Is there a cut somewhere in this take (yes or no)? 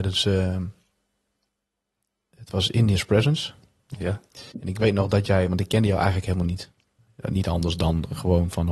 yes